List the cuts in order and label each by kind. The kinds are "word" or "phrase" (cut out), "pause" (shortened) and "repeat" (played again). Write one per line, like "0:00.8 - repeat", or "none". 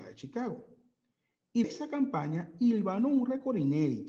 0:01.6 - word